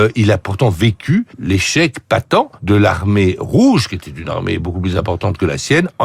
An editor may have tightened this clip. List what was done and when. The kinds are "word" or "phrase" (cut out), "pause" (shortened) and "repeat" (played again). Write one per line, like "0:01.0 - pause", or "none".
0:01.3 - pause
0:02.6 - pause